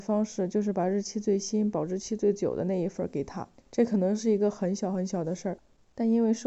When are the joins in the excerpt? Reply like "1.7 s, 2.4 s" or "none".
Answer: 3.6 s